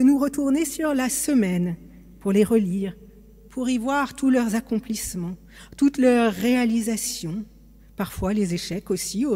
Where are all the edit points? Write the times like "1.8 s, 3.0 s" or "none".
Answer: none